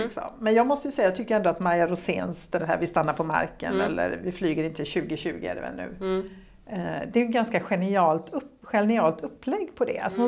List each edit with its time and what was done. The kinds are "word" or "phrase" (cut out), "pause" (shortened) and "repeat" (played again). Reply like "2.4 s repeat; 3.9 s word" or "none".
2.6 s word